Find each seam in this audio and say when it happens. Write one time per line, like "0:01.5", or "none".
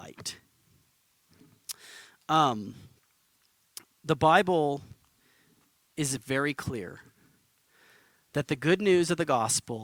none